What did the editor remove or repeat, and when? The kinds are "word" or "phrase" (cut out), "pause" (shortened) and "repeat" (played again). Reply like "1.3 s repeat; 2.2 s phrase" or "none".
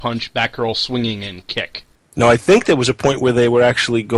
none